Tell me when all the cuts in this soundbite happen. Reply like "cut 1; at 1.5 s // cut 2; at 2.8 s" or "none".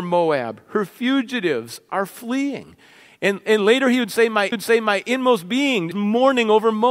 cut 1; at 4.5 s // cut 2; at 5.9 s